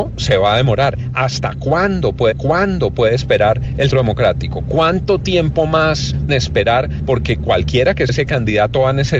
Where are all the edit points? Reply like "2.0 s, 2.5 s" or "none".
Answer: 2.3 s, 3.9 s, 6.3 s, 8.1 s

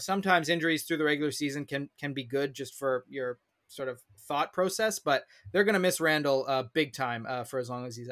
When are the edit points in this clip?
none

